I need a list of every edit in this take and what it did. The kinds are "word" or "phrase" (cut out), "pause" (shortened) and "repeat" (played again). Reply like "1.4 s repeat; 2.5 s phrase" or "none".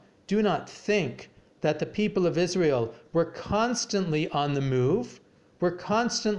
none